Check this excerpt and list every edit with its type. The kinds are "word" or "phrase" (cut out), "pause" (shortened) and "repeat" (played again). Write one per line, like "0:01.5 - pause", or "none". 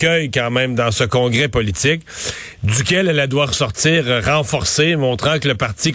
none